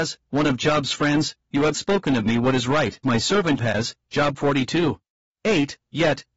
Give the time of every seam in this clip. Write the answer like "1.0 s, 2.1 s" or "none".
1.7 s, 3.0 s, 3.6 s, 5.1 s